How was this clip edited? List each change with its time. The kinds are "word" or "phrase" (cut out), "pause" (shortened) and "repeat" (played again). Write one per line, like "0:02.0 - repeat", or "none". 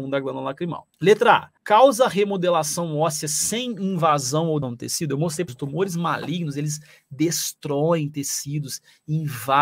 0:00.9 - pause
0:01.6 - pause
0:04.6 - word
0:05.5 - word